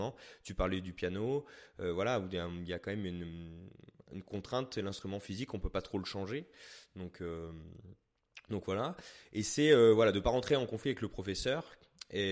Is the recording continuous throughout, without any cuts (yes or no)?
yes